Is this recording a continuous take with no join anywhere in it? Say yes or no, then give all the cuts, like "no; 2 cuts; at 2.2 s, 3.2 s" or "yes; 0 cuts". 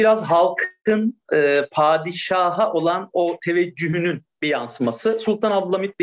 yes; 0 cuts